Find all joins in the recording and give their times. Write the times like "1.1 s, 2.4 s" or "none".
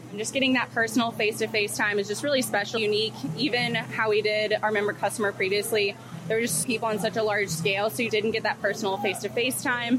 2.8 s, 6.6 s, 8.1 s